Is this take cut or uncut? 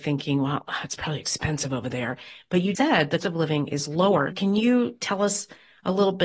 cut